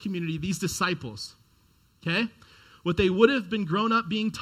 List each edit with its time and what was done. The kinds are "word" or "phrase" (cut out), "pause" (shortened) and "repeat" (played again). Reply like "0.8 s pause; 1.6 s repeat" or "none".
none